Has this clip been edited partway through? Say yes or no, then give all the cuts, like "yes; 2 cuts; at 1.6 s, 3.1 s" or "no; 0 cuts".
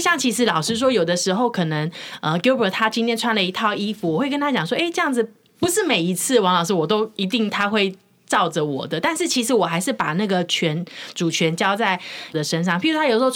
yes; 1 cut; at 12.3 s